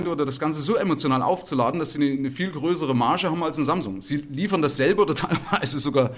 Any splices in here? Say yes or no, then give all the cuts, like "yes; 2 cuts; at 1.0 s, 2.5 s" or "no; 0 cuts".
no; 0 cuts